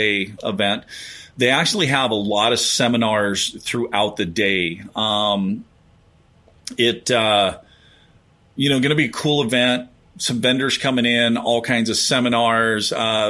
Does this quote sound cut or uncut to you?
uncut